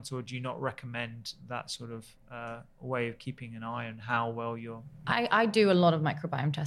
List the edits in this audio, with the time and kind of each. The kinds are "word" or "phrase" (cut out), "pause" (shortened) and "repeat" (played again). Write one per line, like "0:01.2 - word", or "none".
none

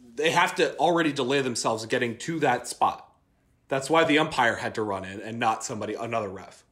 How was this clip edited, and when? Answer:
none

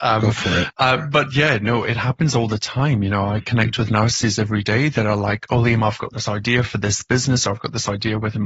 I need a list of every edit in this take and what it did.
none

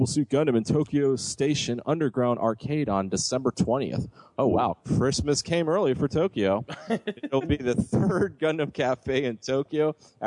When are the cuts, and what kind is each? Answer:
none

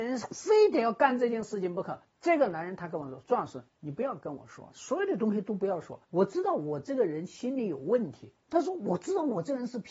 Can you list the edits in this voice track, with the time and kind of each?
0:02.0 - pause
0:03.7 - pause
0:06.0 - pause
0:08.4 - pause

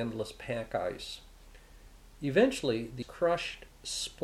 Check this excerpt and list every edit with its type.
0:03.0 - word

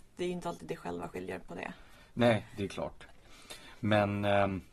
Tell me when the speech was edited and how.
none

